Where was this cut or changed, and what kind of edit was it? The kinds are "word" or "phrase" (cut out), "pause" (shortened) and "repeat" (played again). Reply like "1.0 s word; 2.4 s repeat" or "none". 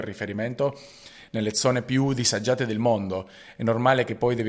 none